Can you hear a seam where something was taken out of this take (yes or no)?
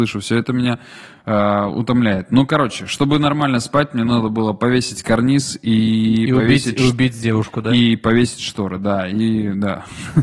no